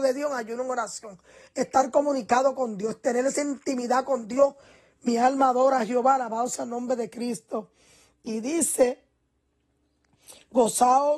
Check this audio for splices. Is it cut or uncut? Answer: uncut